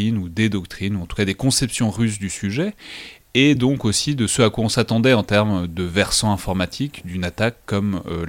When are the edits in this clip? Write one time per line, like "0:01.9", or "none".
none